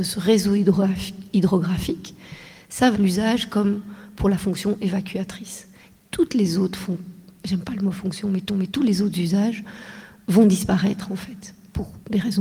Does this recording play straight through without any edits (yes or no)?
no